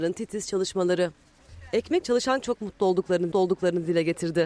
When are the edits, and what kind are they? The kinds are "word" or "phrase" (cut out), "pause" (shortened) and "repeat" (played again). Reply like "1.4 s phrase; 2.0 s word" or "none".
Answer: 2.0 s word; 2.4 s phrase; 3.3 s repeat